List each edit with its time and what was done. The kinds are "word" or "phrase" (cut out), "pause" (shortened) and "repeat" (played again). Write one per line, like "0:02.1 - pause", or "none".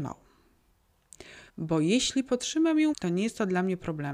0:01.5 - pause
0:02.9 - word